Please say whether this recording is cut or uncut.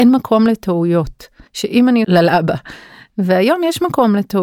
cut